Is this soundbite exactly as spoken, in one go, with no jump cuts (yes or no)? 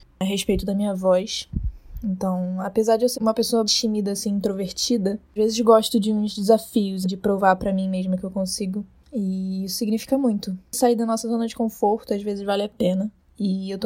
no